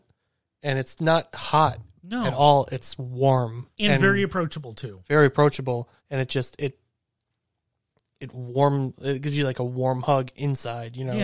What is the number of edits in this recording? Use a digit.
2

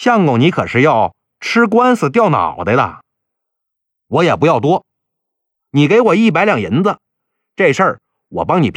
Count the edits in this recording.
0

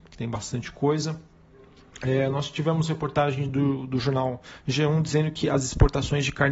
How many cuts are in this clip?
0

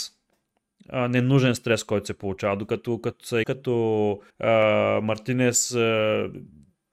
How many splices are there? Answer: 2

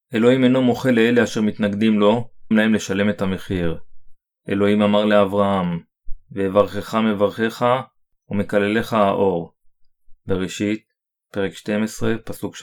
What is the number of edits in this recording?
2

